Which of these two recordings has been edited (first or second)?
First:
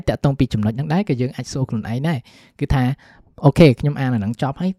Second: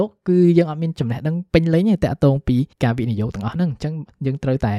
second